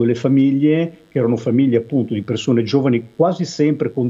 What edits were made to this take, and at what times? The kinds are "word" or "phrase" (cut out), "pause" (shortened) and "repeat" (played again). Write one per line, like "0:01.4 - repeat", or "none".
none